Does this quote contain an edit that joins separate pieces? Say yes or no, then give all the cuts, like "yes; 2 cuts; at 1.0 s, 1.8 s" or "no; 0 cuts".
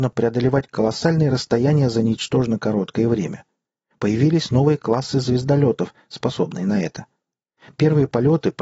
no; 0 cuts